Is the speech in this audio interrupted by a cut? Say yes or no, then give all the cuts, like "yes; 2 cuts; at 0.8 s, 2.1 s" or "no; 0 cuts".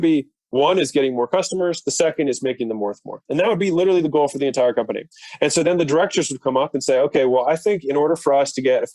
yes; 1 cut; at 3.3 s